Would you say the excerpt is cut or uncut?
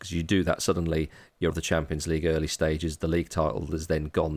cut